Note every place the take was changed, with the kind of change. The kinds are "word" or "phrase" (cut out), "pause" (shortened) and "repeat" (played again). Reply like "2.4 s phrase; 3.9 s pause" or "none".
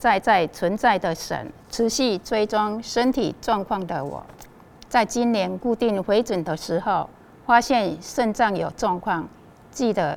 1.6 s pause